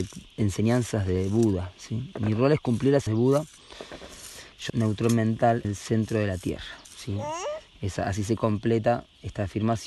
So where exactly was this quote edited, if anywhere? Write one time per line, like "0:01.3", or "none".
0:03.1
0:04.7
0:05.6
0:06.8